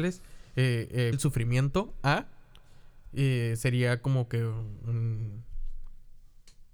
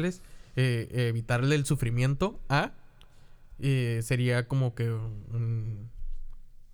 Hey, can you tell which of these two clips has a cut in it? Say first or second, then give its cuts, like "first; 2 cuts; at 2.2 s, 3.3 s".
first; 1 cut; at 1.1 s